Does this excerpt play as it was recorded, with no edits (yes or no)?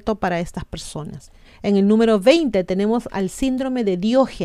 no